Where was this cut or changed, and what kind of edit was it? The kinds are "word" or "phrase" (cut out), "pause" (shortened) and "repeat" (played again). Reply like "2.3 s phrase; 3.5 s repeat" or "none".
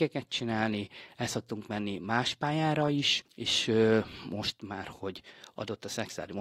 3.3 s pause

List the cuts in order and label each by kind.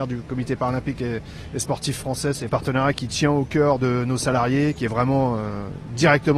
2.5 s phrase

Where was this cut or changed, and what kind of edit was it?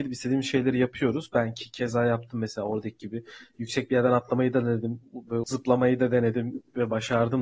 5.4 s word

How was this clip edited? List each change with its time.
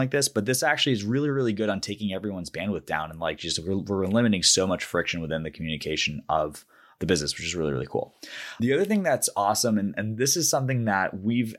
none

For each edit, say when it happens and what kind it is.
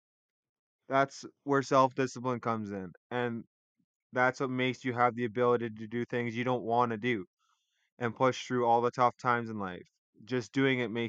none

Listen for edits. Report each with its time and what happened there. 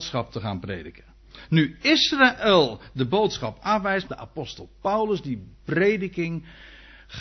4.1 s word

